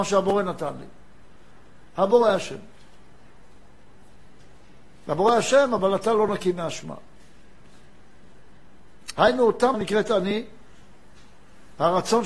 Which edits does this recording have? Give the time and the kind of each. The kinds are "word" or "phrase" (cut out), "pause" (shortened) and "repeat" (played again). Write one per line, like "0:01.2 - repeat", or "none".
0:09.7 - word